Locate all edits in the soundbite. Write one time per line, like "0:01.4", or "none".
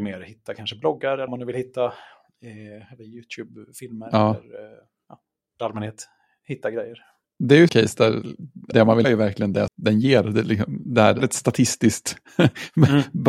0:01.3
0:05.6
0:07.7
0:08.7
0:09.0
0:09.7
0:11.2